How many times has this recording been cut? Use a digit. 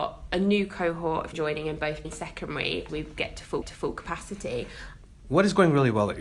4